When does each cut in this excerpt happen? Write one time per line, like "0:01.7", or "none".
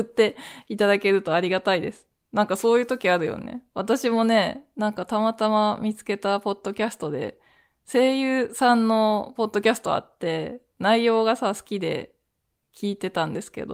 none